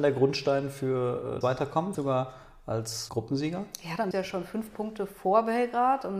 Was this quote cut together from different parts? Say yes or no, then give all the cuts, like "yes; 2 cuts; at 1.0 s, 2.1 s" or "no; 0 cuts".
yes; 4 cuts; at 1.4 s, 1.9 s, 3.1 s, 4.1 s